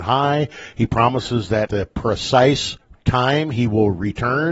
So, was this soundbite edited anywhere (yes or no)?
yes